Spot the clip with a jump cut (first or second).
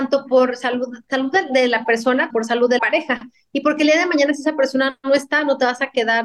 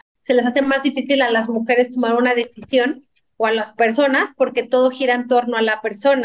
first